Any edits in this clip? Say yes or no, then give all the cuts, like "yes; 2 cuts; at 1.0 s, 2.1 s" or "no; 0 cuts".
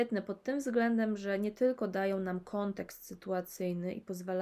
no; 0 cuts